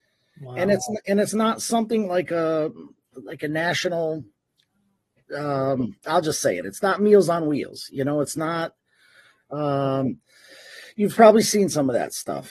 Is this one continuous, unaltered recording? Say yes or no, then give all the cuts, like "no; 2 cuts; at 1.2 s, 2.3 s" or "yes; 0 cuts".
yes; 0 cuts